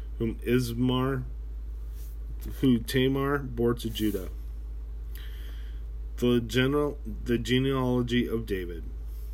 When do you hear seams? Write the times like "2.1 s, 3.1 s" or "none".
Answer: none